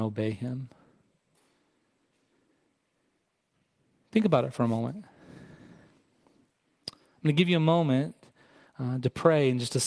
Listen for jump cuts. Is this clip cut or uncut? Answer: uncut